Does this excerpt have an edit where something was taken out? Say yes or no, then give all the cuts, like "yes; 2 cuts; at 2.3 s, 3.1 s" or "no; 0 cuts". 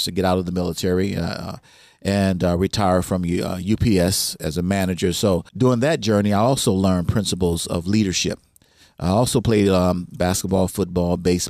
yes; 1 cut; at 5.5 s